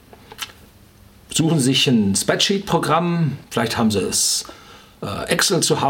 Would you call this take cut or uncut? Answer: cut